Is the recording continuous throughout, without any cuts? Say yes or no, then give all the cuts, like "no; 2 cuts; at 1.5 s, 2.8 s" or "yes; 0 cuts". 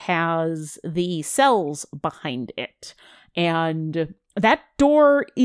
yes; 0 cuts